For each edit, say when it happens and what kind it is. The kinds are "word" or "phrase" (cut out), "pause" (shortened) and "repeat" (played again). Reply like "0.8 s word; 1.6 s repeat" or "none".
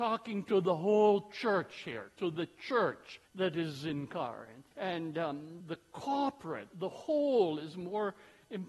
3.2 s pause; 4.7 s pause; 5.6 s word; 6.7 s word